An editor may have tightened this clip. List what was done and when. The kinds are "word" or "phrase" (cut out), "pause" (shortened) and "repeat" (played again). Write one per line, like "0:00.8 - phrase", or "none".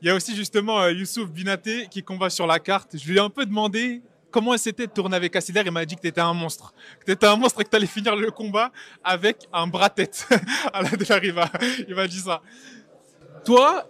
none